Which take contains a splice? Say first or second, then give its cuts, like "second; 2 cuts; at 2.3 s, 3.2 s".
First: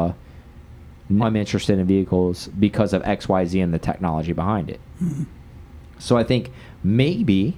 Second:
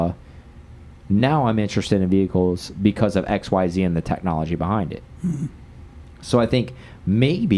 first; 1 cut; at 1.2 s